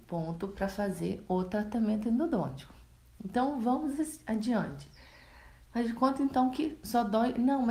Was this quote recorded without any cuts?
yes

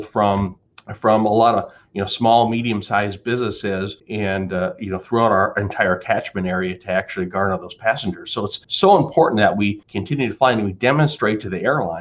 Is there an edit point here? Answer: no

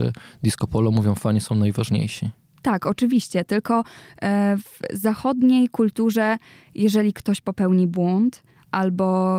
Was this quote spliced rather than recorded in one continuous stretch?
no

